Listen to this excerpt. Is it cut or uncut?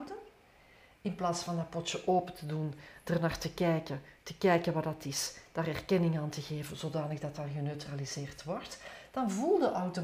uncut